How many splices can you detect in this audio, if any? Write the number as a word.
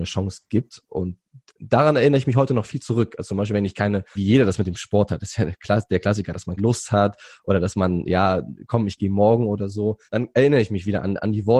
three